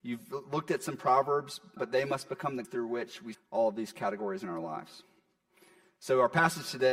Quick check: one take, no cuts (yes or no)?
no